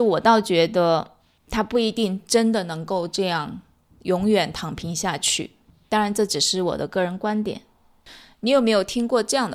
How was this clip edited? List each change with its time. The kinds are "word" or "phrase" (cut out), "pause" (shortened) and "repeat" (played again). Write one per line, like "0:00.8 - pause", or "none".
none